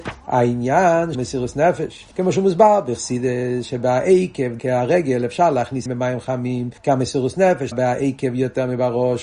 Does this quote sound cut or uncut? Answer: cut